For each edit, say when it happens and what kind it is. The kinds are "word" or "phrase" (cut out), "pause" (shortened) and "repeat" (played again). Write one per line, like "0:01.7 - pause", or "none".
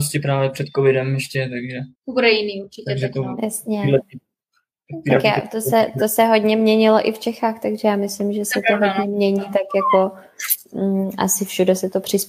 0:01.9 - pause